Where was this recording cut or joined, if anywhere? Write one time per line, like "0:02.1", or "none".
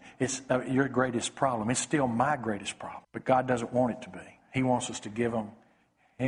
0:03.0